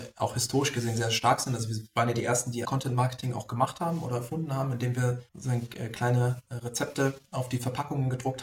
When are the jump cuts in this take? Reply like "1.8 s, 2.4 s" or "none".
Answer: 2.6 s, 5.3 s